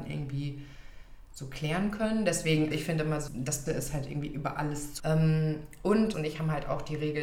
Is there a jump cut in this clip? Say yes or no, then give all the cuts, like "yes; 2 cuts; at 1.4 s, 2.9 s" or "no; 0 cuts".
yes; 5 cuts; at 2.7 s, 3.3 s, 3.7 s, 5.0 s, 6.1 s